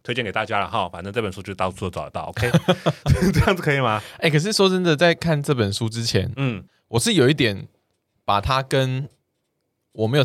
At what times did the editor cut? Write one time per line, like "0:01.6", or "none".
0:06.7